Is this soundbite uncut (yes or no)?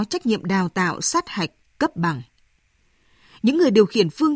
yes